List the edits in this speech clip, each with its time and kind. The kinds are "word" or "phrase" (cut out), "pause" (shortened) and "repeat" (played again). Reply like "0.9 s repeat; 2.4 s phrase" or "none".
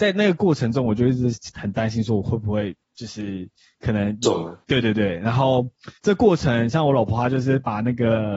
2.8 s pause; 4.6 s pause; 6.0 s pause